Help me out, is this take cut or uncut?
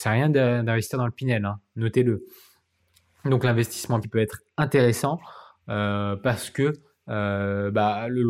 cut